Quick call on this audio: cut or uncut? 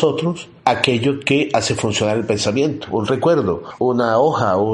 uncut